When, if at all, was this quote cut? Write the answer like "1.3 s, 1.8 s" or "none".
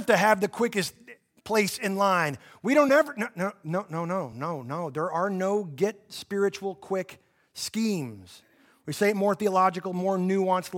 none